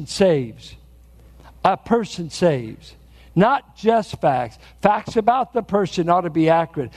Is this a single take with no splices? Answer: yes; 0 cuts

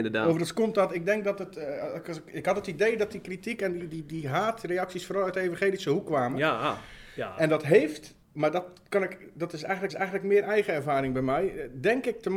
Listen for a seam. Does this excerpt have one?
yes; 2 cuts; at 8.2 s, 9.9 s

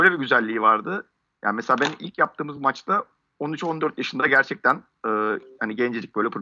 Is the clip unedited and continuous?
yes; 0 cuts

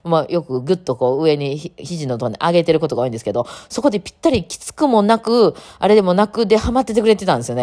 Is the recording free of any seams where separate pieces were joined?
yes; 0 cuts

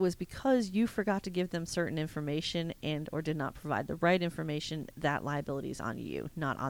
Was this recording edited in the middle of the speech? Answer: no; 0 cuts

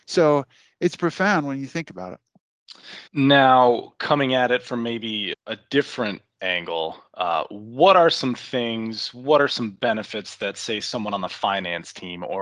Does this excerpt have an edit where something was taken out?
yes; 3 cuts; at 1.0 s, 3.1 s, 5.3 s

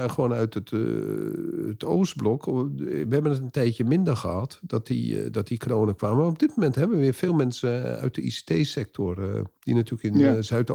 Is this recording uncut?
yes; 0 cuts

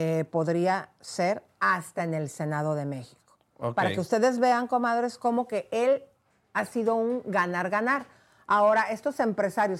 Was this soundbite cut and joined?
no; 0 cuts

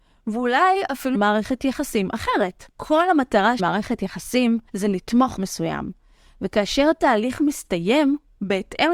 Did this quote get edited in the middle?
yes; 5 cuts; at 1.1 s, 2.7 s, 3.6 s, 4.7 s, 5.4 s

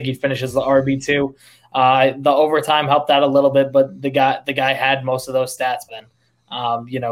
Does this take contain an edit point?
yes; 1 cut; at 5.9 s

